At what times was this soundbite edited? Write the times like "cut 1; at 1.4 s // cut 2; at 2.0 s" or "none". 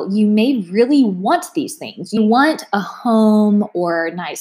cut 1; at 2.2 s